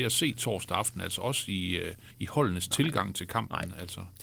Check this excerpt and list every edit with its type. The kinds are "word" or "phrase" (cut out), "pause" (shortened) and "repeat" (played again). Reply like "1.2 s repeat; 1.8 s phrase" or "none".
2.1 s pause